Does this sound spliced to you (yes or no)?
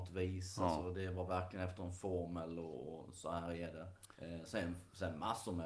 yes